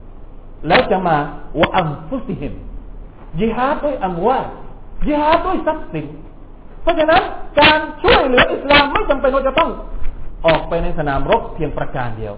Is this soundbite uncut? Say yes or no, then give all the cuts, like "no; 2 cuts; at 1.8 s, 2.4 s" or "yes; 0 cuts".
yes; 0 cuts